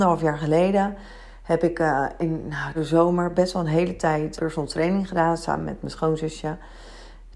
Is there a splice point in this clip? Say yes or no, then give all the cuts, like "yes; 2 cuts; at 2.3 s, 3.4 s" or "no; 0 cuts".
yes; 2 cuts; at 2.7 s, 4.4 s